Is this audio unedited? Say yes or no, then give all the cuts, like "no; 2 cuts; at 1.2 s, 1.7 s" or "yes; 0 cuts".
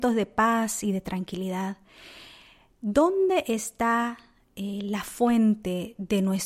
yes; 0 cuts